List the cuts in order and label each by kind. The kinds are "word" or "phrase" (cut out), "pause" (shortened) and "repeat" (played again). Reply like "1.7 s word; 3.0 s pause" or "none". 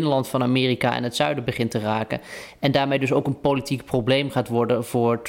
none